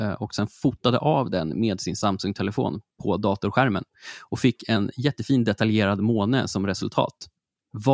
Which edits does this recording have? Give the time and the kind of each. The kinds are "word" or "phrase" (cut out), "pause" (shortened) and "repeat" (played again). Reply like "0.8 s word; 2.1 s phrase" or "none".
none